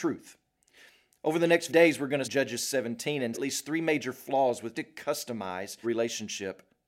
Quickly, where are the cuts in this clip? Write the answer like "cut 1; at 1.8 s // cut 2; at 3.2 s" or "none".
cut 1; at 1.7 s // cut 2; at 2.2 s // cut 3; at 3.3 s // cut 4; at 4.7 s // cut 5; at 5.8 s